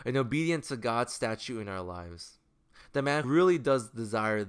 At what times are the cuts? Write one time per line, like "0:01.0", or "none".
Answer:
0:03.2